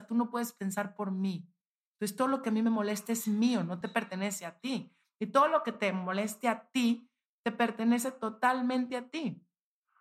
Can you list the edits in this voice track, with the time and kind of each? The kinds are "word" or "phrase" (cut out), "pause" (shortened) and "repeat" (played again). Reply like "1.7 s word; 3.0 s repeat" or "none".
none

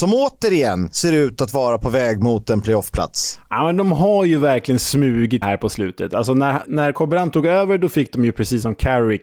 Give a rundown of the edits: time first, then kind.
5.4 s word; 6.6 s word

